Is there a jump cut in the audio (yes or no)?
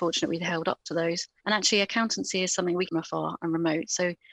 yes